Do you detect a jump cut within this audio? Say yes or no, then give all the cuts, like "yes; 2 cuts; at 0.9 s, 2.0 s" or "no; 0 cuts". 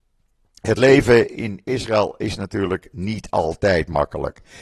no; 0 cuts